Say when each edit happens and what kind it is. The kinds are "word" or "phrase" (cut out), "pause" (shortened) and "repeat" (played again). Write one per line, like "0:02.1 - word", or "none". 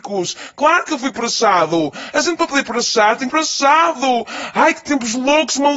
0:03.3 - word